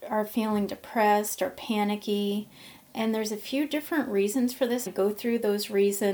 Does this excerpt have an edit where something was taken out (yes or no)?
yes